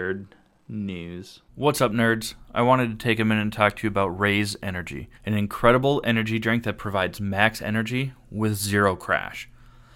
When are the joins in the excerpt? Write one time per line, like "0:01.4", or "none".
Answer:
0:01.5
0:05.2